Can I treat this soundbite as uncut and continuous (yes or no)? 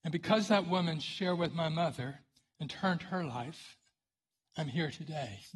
yes